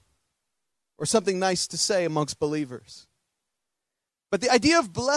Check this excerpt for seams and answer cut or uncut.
uncut